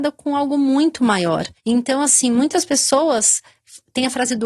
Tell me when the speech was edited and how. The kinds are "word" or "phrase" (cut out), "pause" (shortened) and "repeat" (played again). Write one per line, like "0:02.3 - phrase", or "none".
0:01.6 - pause